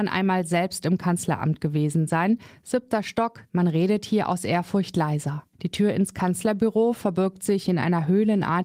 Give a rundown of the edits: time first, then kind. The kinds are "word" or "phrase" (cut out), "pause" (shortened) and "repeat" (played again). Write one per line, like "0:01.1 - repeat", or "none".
0:05.5 - pause